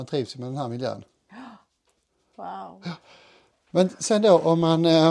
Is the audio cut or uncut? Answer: uncut